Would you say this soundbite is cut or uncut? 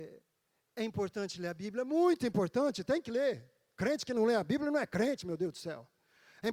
uncut